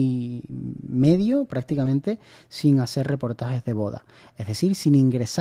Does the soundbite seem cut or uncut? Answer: uncut